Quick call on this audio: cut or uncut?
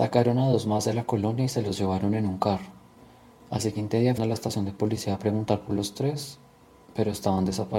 cut